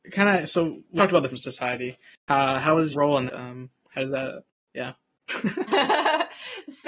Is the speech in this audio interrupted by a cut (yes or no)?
yes